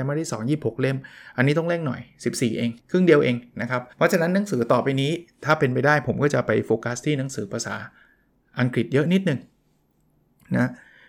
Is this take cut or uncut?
cut